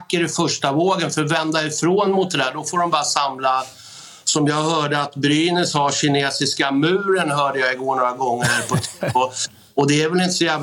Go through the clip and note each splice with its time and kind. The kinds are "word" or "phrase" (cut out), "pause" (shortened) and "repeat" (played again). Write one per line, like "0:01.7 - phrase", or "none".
none